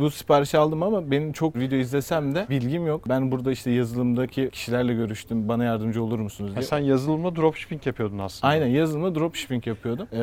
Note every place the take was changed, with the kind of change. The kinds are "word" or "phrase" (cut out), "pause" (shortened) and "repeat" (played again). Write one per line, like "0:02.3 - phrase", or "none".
0:01.5 - phrase
0:02.5 - phrase